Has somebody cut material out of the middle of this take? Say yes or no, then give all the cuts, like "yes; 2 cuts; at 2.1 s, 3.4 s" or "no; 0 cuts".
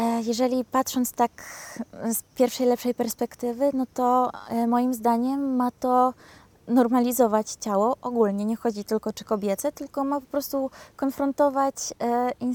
no; 0 cuts